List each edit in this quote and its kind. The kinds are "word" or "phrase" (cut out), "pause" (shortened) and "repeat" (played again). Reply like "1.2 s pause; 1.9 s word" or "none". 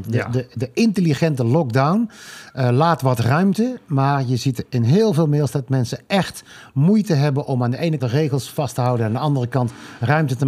8.0 s word